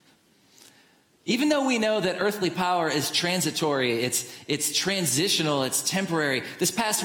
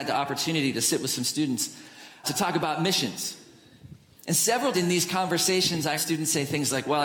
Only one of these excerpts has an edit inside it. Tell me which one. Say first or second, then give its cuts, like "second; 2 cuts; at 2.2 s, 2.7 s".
second; 3 cuts; at 2.2 s, 4.7 s, 6.0 s